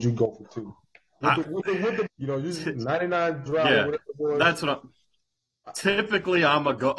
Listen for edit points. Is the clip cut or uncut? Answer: cut